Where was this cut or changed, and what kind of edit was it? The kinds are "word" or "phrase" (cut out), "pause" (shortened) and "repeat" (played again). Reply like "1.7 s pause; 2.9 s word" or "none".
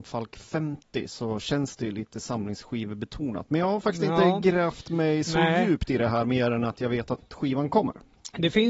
none